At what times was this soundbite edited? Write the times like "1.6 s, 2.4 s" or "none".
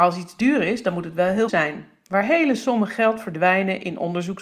1.5 s